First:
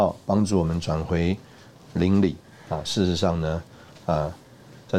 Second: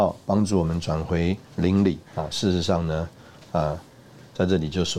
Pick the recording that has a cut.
second; 2 cuts; at 1.5 s, 2.1 s

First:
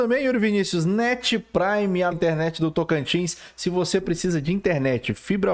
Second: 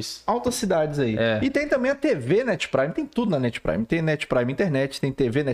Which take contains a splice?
first; 1 cut; at 2.1 s

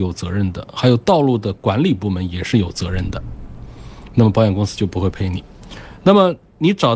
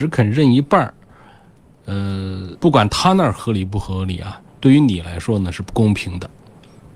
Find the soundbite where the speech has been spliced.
second; 2 cuts; at 2.6 s, 4.5 s

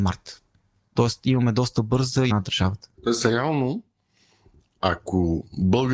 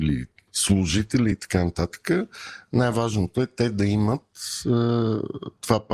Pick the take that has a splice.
first; 2 cuts; at 2.3 s, 2.9 s

